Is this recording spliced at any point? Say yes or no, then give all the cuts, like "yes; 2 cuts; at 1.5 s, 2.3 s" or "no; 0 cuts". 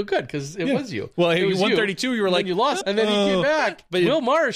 yes; 1 cut; at 2.8 s